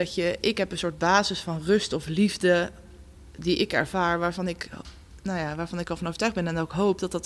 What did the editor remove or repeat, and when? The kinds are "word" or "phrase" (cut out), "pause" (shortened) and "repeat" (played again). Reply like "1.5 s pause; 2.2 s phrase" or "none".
none